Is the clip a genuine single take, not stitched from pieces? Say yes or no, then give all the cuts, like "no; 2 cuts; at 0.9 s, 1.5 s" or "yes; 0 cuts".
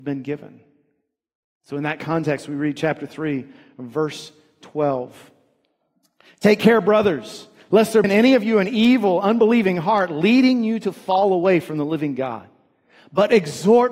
no; 1 cut; at 8.0 s